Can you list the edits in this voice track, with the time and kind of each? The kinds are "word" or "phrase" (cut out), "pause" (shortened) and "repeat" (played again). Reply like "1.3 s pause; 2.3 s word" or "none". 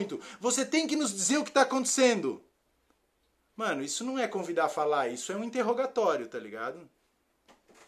none